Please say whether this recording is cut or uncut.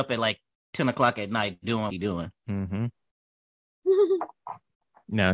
cut